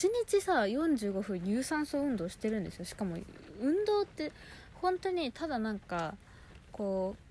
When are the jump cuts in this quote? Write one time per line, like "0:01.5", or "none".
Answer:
none